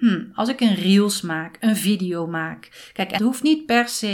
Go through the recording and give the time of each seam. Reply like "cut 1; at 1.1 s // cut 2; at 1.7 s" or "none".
cut 1; at 3.2 s